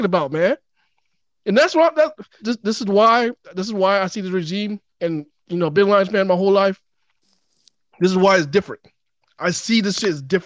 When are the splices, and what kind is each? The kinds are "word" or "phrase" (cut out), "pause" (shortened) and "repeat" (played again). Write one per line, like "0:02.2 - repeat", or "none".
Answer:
0:02.4 - word
0:04.9 - pause